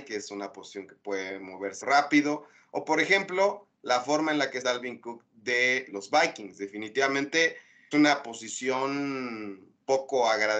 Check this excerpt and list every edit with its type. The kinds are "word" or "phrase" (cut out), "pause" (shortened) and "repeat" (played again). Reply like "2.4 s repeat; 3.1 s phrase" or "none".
1.8 s word; 4.6 s word; 5.9 s word; 7.9 s word